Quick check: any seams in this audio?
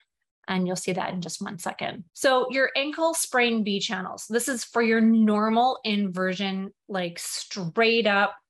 yes; 1 cut; at 2.1 s

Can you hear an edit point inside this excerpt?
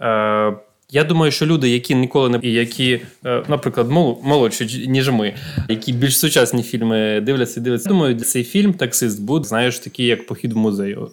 yes; 5 cuts; at 2.4 s, 5.7 s, 7.9 s, 8.2 s, 9.4 s

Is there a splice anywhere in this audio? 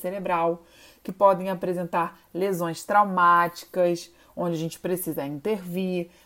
no; 0 cuts

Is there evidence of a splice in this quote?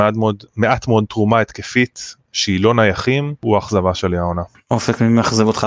no; 0 cuts

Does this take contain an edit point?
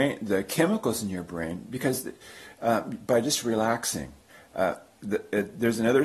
yes; 1 cut; at 4.3 s

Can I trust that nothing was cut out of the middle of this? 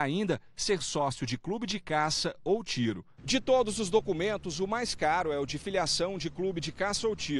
yes; 0 cuts

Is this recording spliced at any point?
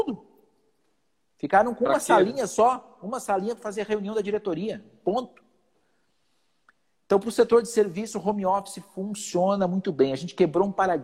no; 0 cuts

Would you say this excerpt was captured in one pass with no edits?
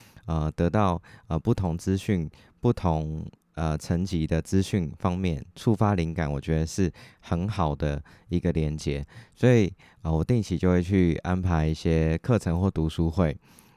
yes; 0 cuts

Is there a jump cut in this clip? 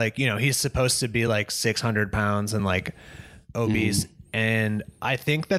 no; 0 cuts

